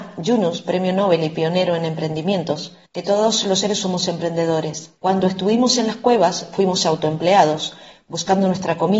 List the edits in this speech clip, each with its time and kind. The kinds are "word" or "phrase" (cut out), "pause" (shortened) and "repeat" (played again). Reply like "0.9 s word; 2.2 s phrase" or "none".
2.9 s pause; 3.8 s word; 5.0 s pause